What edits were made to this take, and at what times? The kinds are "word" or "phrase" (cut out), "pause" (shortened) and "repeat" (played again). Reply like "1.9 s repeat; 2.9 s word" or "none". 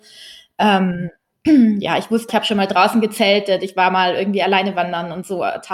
2.3 s word